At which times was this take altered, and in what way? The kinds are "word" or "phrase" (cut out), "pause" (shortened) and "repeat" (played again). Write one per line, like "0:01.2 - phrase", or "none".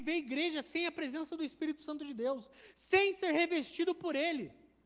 none